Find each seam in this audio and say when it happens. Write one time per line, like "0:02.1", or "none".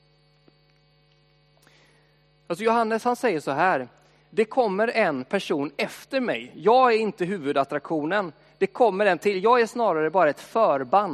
none